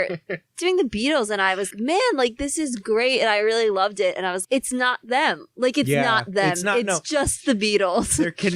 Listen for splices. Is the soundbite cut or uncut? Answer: cut